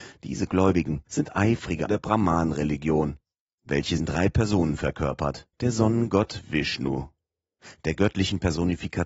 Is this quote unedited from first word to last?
no; 4 cuts; at 1.1 s, 1.9 s, 4.0 s, 5.5 s

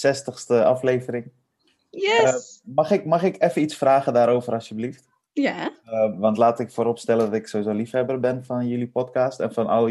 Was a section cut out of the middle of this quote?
no; 0 cuts

